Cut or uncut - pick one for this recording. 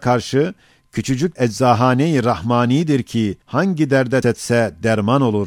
cut